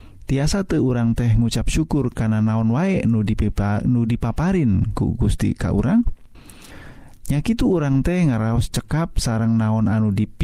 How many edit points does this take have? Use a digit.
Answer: 0